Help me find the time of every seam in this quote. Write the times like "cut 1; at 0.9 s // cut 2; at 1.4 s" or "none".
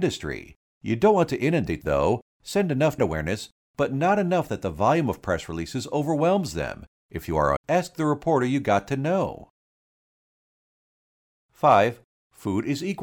cut 1; at 1.8 s // cut 2; at 3.0 s // cut 3; at 7.6 s